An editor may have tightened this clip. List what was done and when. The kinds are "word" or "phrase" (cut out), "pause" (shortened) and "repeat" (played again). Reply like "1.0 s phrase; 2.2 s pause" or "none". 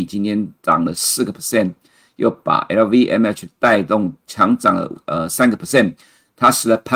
none